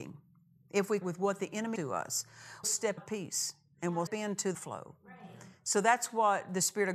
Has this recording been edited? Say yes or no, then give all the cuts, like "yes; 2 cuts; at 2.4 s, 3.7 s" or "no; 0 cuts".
yes; 6 cuts; at 1.0 s, 1.8 s, 2.6 s, 3.0 s, 4.1 s, 4.5 s